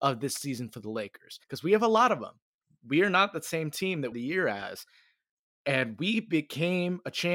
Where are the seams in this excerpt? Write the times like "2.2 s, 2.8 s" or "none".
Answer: 1.4 s, 4.1 s